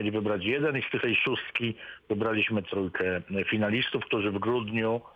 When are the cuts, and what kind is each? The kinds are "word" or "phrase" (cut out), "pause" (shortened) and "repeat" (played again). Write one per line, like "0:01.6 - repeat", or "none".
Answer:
0:01.0 - word
0:02.6 - word